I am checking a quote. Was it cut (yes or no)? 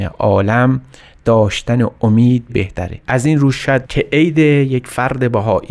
yes